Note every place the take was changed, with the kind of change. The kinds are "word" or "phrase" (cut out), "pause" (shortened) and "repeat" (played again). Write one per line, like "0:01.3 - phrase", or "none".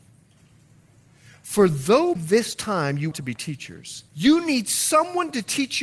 0:02.2 - word
0:03.1 - word
0:04.1 - pause

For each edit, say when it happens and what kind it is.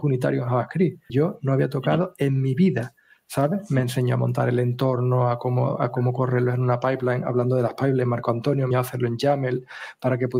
0:01.1 - word
0:08.7 - word

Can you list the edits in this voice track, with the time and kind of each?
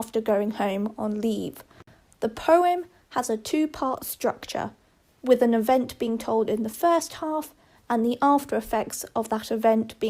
none

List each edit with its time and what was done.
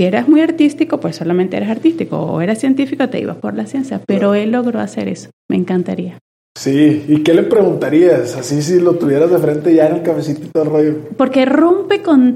0:05.4 - pause

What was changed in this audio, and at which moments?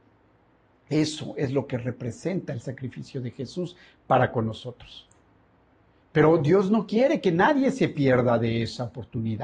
none

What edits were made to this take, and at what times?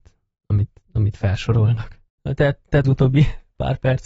0:02.8 - phrase

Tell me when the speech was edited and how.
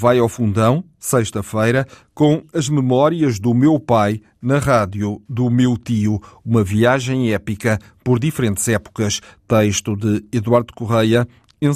none

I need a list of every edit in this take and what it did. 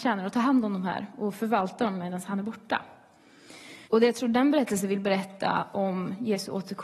0:03.9 - pause

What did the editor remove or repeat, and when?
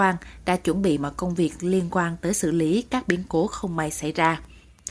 none

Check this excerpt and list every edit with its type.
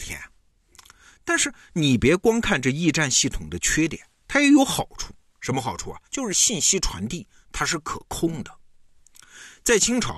0:06.1 - pause

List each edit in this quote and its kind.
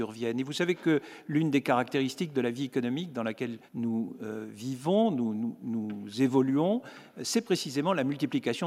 0:03.7 - pause

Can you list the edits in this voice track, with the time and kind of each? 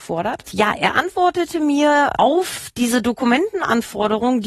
none

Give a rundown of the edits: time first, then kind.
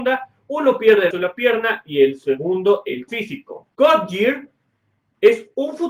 0:01.1 - word
0:03.1 - word
0:03.7 - pause

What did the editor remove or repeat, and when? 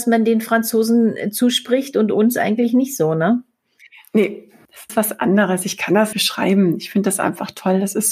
0:04.9 - word
0:06.1 - word

